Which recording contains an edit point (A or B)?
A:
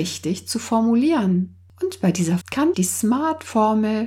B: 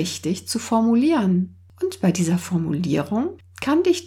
A